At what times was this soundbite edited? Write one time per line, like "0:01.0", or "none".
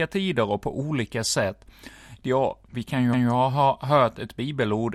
0:03.1